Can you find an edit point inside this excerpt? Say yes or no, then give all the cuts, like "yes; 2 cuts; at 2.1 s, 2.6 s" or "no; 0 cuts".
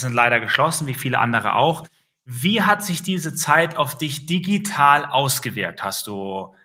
no; 0 cuts